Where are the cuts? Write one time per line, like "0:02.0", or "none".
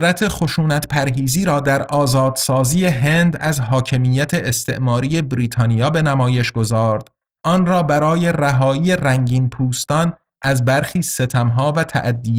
0:07.4